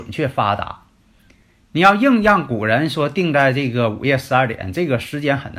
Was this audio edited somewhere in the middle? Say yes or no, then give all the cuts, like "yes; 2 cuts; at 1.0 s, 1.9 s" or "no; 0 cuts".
no; 0 cuts